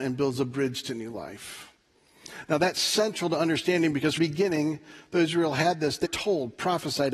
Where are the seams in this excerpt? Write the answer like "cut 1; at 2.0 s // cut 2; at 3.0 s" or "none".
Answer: cut 1; at 4.2 s // cut 2; at 6.1 s